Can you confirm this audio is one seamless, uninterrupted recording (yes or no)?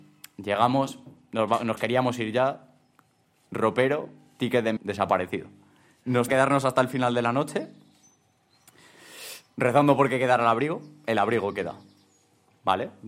no